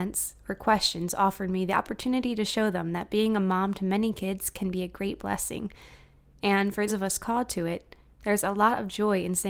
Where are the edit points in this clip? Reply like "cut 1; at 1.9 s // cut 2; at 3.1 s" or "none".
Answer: cut 1; at 6.9 s